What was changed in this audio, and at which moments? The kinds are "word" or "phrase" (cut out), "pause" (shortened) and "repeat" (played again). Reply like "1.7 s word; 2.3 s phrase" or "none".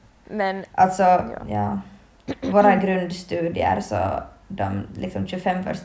none